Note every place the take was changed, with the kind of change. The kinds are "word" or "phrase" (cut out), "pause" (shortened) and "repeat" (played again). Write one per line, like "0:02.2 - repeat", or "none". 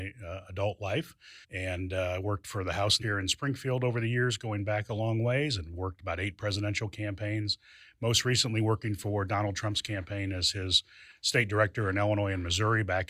0:01.4 - pause
0:03.0 - phrase